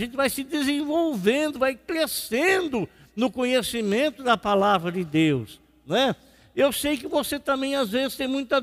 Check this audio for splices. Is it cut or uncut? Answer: uncut